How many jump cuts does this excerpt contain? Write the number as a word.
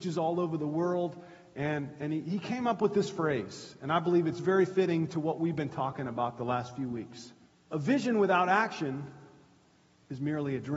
one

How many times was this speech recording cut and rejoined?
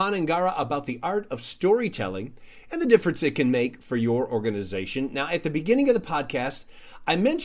zero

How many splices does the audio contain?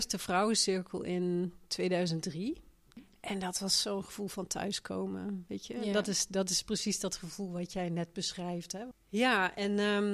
zero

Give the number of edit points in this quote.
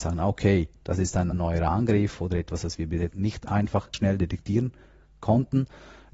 three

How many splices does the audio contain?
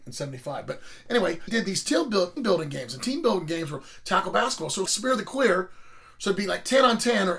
three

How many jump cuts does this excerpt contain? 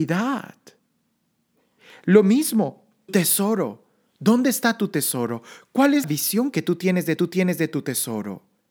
three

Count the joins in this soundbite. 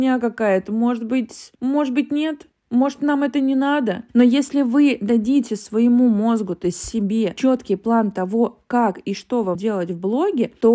two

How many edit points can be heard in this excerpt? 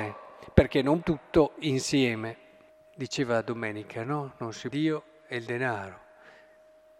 three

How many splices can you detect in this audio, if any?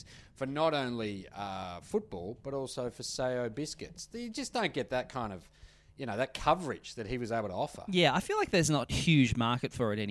zero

